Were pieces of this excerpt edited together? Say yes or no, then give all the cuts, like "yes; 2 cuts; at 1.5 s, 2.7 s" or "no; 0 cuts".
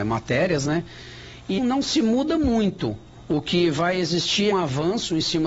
yes; 2 cuts; at 1.6 s, 4.5 s